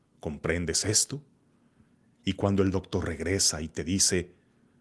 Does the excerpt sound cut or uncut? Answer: uncut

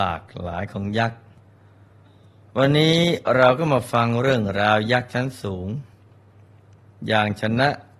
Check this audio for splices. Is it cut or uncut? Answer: uncut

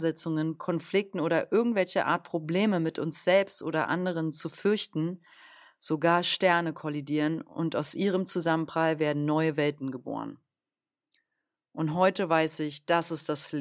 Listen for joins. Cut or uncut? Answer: uncut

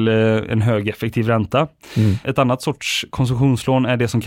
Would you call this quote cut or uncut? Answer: uncut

